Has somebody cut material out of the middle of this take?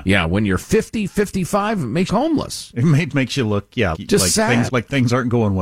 yes; 4 cuts; at 2.1 s, 3.1 s, 3.9 s, 4.7 s

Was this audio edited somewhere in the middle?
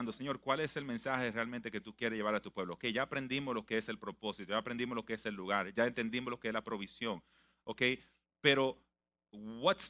no; 0 cuts

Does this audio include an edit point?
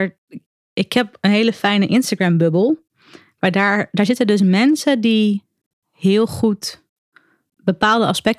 no; 0 cuts

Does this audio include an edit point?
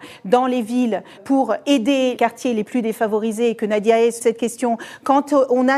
yes; 3 cuts; at 1.2 s, 2.2 s, 4.2 s

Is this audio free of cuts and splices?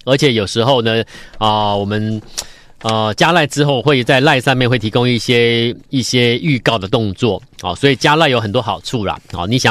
no; 1 cut; at 5.9 s

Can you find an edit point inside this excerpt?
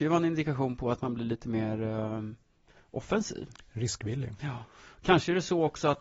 no; 0 cuts

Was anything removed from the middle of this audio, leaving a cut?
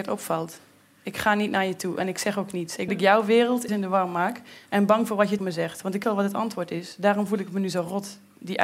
yes; 4 cuts; at 2.9 s, 3.7 s, 5.4 s, 6.0 s

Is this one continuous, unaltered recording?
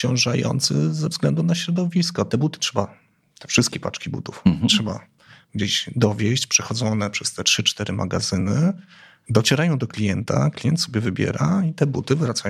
yes; 0 cuts

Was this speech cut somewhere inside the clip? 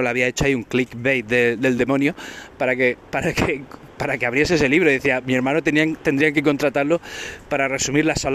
no; 0 cuts

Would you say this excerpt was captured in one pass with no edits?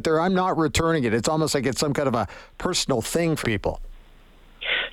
no; 1 cut; at 3.4 s

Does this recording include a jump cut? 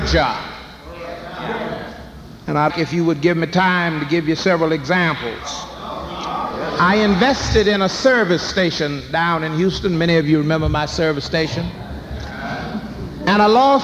yes; 1 cut; at 2.7 s

